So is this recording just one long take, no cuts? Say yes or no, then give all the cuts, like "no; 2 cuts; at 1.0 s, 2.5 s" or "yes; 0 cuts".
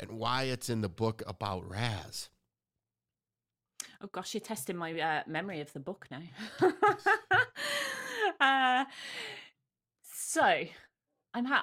yes; 0 cuts